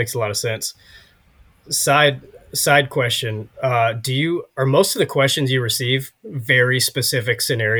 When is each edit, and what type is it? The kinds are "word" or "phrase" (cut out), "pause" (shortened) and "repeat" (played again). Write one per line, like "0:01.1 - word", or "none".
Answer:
0:03.5 - pause
0:06.2 - pause